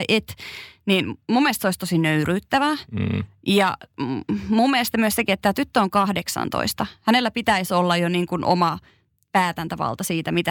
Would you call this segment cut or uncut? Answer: uncut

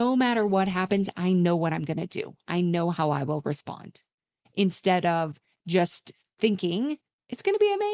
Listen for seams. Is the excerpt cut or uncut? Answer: uncut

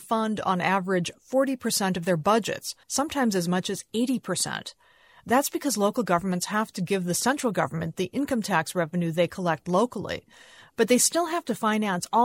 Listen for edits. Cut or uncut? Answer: cut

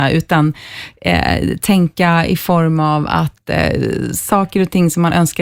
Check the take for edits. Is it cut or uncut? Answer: uncut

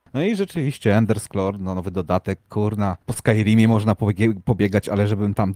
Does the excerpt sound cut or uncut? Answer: cut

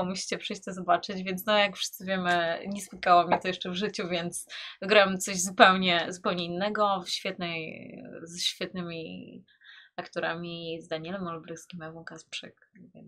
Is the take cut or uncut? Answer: uncut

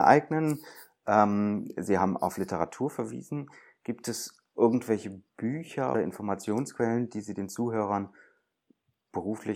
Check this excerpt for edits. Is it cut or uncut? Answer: cut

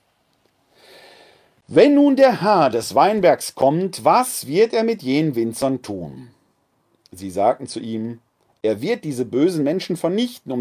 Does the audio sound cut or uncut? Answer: uncut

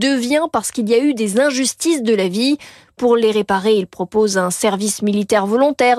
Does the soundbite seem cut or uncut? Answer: uncut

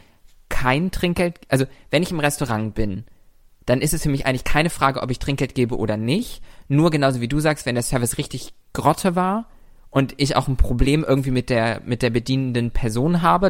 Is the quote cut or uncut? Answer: uncut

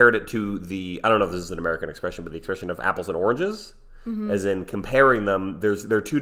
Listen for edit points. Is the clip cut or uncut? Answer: uncut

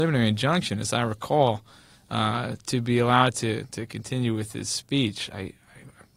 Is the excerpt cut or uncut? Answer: uncut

